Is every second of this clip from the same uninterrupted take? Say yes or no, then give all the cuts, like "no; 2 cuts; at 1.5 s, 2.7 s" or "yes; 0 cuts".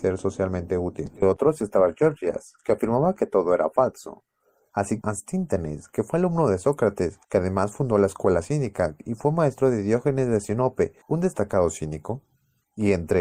no; 3 cuts; at 5.0 s, 7.2 s, 11.0 s